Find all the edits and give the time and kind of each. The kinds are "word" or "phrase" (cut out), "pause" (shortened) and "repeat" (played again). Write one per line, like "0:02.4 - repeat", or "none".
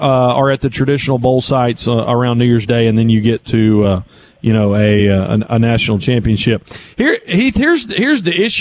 none